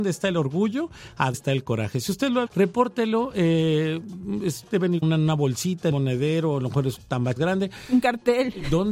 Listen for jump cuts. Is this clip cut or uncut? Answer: cut